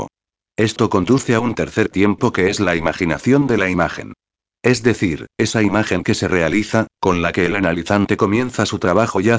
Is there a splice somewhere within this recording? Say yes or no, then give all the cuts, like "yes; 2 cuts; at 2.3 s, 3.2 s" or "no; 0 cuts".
no; 0 cuts